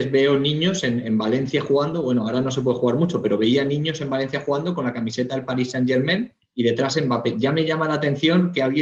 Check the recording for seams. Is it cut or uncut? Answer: cut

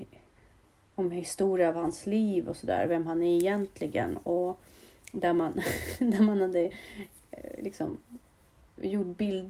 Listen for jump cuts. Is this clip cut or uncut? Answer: uncut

